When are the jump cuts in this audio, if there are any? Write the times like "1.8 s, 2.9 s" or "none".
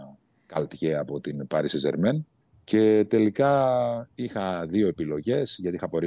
2.4 s, 4.1 s